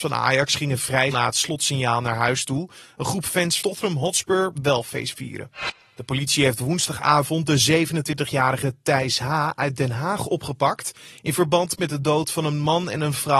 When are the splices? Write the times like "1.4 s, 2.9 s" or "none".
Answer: 1.1 s, 3.6 s, 4.5 s